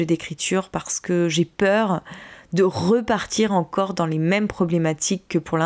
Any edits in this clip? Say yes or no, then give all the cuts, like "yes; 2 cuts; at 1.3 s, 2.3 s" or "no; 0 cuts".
no; 0 cuts